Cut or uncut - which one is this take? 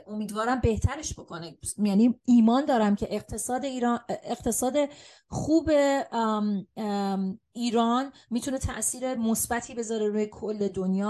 uncut